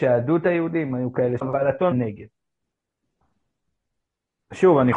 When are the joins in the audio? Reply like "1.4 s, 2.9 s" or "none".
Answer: 1.4 s, 1.9 s